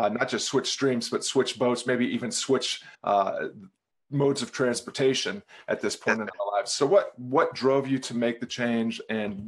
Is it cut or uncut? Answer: cut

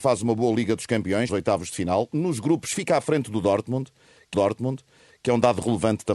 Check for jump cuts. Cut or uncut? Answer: cut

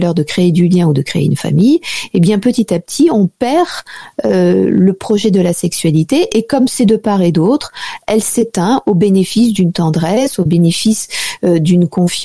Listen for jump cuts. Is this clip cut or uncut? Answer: uncut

